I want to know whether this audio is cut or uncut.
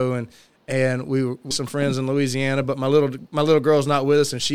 cut